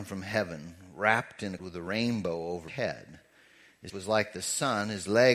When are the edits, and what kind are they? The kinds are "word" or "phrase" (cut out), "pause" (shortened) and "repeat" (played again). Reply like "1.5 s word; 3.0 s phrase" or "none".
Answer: 1.6 s word; 2.7 s word; 3.9 s word